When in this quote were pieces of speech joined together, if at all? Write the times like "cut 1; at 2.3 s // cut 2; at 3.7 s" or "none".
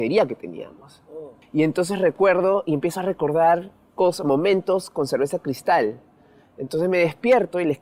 none